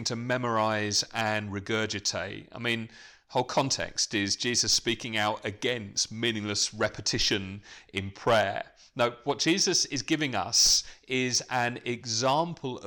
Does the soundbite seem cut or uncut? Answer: uncut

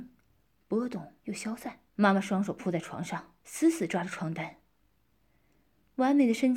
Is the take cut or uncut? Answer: cut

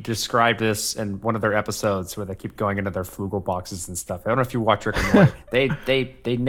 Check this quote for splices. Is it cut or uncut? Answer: uncut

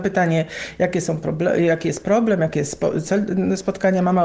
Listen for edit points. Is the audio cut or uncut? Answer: uncut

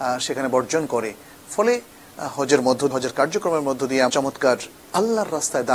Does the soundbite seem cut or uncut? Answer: cut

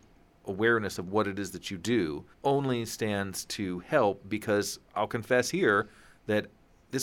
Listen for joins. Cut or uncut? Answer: cut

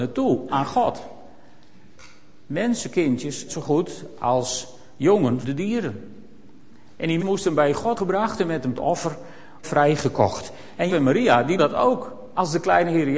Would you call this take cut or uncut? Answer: cut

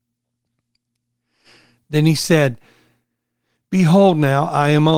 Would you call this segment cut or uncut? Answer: uncut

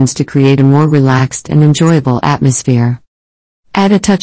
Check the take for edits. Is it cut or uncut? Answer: uncut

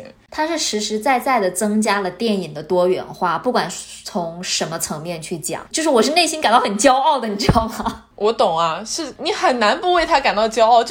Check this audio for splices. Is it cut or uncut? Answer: cut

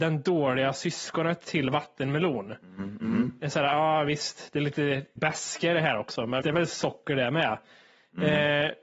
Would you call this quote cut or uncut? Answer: cut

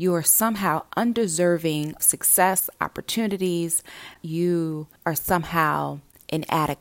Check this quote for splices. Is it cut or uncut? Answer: cut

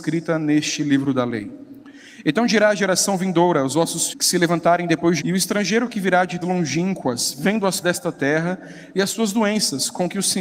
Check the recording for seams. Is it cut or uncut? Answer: cut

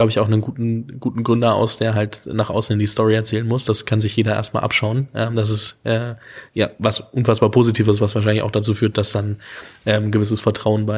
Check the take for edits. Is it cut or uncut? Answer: uncut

